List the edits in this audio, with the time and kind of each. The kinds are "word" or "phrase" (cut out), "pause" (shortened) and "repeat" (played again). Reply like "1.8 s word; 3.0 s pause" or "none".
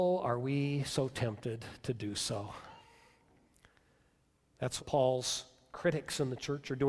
4.8 s word